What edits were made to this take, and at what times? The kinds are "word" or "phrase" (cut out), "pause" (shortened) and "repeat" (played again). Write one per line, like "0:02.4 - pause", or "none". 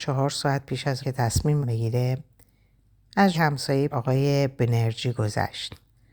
0:01.0 - word
0:01.6 - word
0:03.3 - word
0:03.9 - word

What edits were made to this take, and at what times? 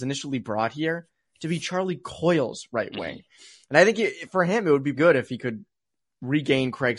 0:04.9 - word

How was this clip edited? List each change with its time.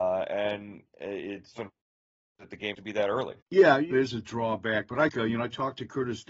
0:01.5 - word
0:02.7 - word
0:03.4 - pause
0:03.9 - phrase
0:05.1 - word

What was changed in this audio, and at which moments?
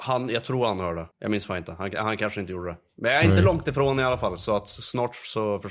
0:01.1 - pause

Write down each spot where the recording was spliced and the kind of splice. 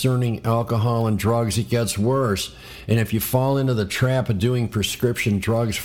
none

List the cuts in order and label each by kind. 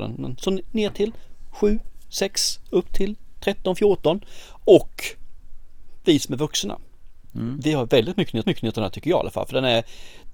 0:08.4 - repeat

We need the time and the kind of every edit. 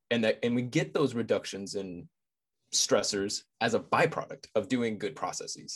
0:03.5 - pause

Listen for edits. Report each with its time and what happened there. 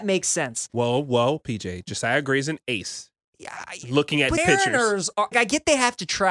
0:04.4 - word
0:05.3 - word

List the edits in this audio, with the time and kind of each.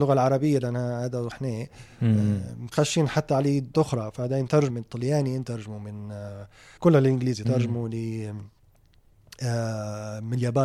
0:01.3 - word
0:02.7 - word
0:03.7 - word
0:04.7 - word
0:06.8 - word
0:07.4 - word

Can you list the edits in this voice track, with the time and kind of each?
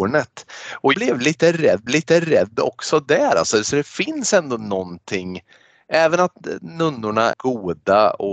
0:00.9 - word
0:01.9 - repeat
0:07.3 - word

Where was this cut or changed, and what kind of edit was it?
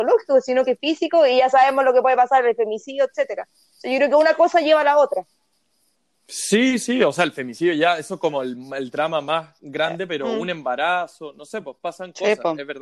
none

